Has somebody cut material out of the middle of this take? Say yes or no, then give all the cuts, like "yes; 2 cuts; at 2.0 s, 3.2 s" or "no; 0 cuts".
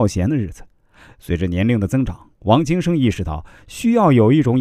yes; 1 cut; at 2.3 s